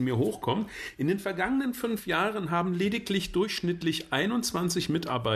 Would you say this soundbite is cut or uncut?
uncut